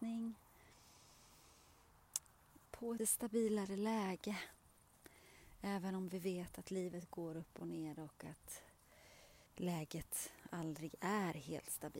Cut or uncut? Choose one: cut